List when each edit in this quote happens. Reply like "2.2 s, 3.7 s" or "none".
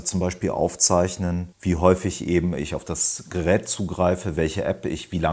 1.5 s